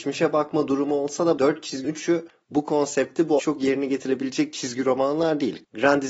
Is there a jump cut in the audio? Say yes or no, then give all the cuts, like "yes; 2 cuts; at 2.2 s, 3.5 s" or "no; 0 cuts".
yes; 3 cuts; at 1.4 s, 1.8 s, 3.4 s